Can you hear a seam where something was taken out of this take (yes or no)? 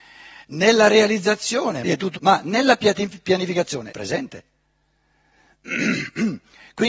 yes